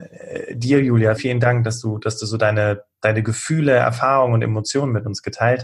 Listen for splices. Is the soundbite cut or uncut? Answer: cut